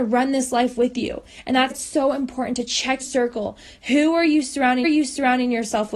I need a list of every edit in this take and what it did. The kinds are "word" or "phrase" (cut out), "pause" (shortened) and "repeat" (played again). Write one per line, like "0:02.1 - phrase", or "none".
0:01.7 - word
0:03.0 - word
0:04.8 - repeat

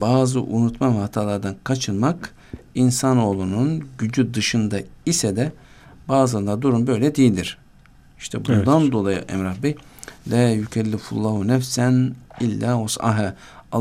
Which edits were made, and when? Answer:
none

